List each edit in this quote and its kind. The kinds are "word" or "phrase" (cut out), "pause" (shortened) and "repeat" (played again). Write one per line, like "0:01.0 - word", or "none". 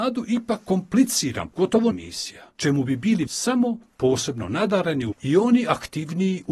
0:01.5 - word
0:01.9 - word
0:02.6 - pause
0:03.3 - word
0:05.1 - word